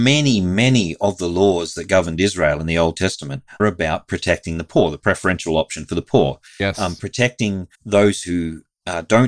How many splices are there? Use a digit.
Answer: 3